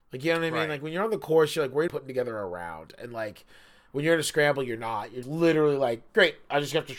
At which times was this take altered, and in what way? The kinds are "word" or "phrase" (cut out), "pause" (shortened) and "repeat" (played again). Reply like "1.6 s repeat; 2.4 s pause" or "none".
1.9 s word; 5.2 s word